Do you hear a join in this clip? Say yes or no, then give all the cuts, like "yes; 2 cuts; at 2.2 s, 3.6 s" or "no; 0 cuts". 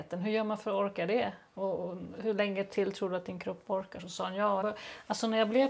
yes; 2 cuts; at 1.5 s, 4.6 s